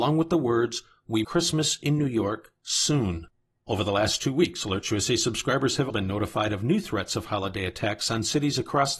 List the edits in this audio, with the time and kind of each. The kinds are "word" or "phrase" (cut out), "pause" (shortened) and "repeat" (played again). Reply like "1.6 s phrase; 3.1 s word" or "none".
1.2 s phrase; 5.9 s word